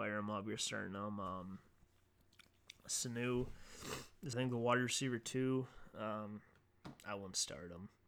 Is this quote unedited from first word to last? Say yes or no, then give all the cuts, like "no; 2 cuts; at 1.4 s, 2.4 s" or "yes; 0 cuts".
no; 1 cut; at 4.3 s